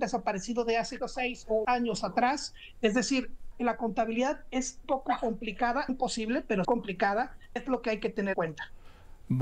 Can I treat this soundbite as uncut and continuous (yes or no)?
no